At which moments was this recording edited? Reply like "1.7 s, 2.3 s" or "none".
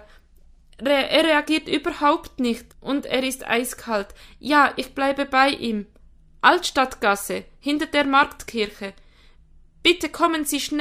2.7 s